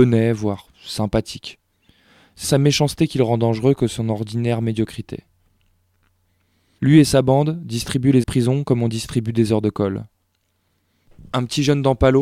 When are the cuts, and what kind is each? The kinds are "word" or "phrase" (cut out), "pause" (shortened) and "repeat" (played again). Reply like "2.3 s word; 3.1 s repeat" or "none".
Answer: 2.4 s word; 8.2 s phrase